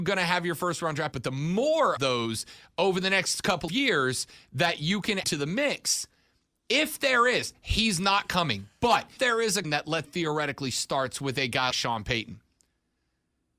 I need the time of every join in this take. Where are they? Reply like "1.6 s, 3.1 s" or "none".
1.1 s, 2.0 s, 3.7 s, 5.2 s, 9.2 s, 9.6 s, 10.0 s, 11.7 s